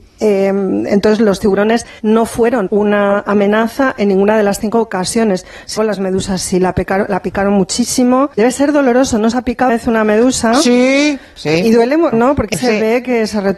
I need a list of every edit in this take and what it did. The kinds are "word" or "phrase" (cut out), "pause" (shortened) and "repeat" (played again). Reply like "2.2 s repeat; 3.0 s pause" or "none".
2.0 s pause; 2.7 s word; 5.8 s word; 8.3 s pause; 9.3 s phrase; 9.7 s word; 12.1 s word; 12.5 s word

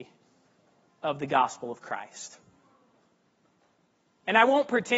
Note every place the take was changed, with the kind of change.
none

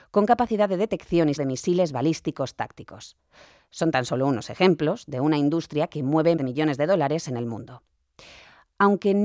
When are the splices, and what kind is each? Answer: 1.4 s word; 6.4 s word

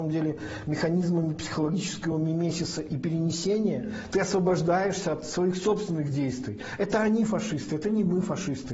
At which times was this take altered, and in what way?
none

